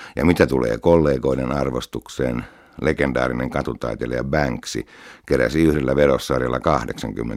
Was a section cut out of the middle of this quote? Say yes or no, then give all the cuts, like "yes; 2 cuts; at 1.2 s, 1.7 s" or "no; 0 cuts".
no; 0 cuts